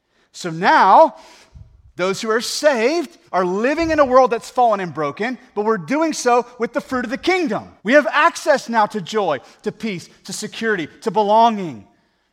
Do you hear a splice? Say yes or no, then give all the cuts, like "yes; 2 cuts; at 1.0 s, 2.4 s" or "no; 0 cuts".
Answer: yes; 2 cuts; at 3.3 s, 7.8 s